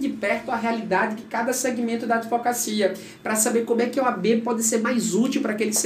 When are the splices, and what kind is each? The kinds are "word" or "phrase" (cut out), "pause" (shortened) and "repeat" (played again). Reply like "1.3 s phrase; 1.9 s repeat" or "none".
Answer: none